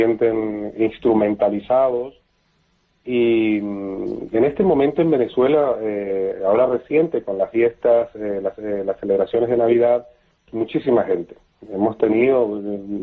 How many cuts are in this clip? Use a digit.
2